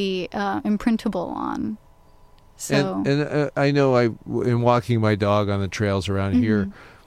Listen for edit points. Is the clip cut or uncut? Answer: uncut